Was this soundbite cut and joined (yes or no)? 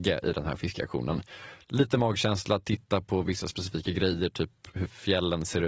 no